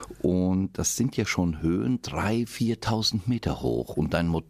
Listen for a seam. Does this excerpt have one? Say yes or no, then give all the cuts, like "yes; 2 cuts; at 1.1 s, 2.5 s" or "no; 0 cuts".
no; 0 cuts